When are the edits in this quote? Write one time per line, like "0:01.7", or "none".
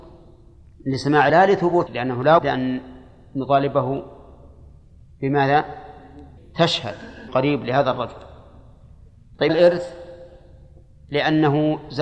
0:01.3
0:01.9
0:02.4
0:06.4
0:07.3
0:09.5